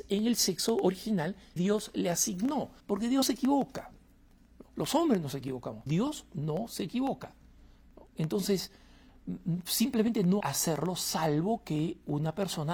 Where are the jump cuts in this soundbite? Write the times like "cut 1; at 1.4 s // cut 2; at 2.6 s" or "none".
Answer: cut 1; at 1.6 s // cut 2; at 2.8 s // cut 3; at 3.2 s // cut 4; at 4.7 s // cut 5; at 5.9 s // cut 6; at 10.4 s